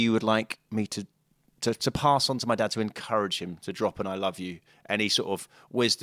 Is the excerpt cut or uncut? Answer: uncut